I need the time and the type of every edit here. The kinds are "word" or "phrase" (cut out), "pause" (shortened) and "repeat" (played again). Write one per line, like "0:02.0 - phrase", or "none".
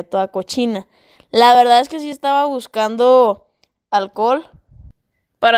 none